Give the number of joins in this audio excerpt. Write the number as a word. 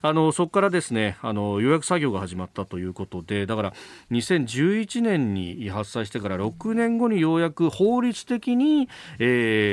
zero